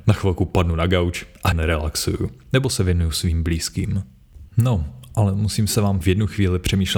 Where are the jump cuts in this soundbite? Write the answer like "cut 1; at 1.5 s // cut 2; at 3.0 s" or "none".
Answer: cut 1; at 1.5 s // cut 2; at 4.5 s // cut 3; at 6.0 s